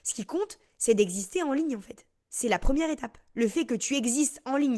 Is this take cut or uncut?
uncut